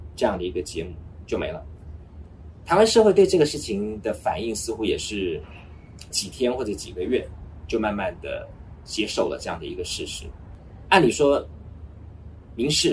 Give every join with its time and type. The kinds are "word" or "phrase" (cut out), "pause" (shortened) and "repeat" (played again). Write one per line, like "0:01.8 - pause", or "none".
0:06.1 - word

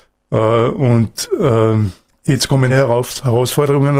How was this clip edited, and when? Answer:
0:02.1 - pause
0:02.7 - word

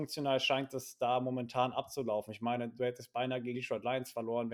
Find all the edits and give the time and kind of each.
0:03.5 - word

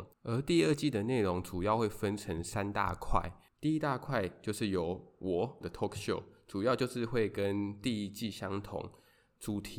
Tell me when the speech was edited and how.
0:05.6 - word

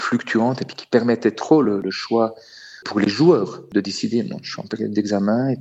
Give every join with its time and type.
none

